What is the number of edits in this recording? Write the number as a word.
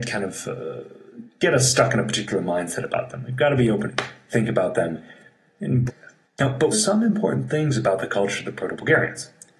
four